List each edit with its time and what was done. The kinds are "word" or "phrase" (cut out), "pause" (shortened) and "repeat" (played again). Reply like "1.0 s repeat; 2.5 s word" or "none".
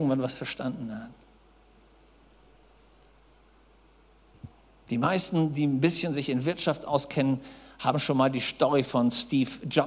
none

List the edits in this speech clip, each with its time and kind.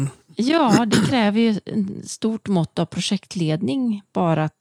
none

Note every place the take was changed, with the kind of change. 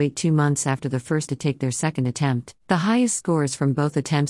1.3 s word; 2.6 s pause

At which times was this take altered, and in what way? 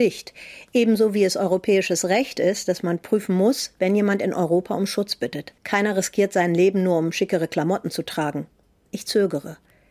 5.6 s pause

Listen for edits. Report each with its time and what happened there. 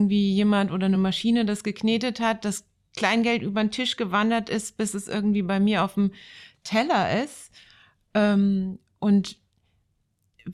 none

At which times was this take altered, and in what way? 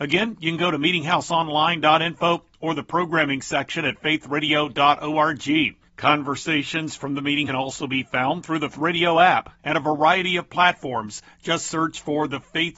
5.9 s pause; 7.5 s phrase; 8.7 s word; 9.6 s pause; 10.5 s word

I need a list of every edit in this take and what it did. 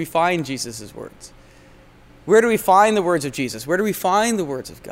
none

